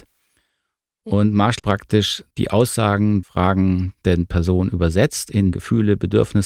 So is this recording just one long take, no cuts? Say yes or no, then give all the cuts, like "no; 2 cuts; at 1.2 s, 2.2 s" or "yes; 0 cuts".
no; 4 cuts; at 1.6 s, 2.3 s, 3.2 s, 5.5 s